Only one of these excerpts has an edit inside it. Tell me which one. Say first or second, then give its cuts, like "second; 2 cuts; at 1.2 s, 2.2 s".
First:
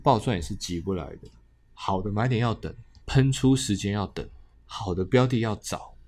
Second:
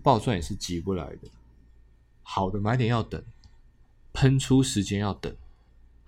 first; 3 cuts; at 1.4 s, 3.0 s, 4.5 s